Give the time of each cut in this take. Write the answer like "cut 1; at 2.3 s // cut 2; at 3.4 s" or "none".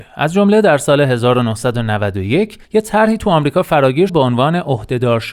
cut 1; at 2.6 s // cut 2; at 4.1 s